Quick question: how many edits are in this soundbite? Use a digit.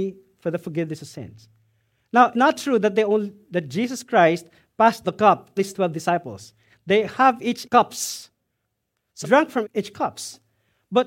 6